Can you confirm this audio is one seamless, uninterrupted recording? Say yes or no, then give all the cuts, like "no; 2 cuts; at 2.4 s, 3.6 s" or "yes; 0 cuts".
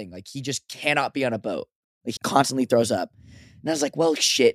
no; 1 cut; at 2.2 s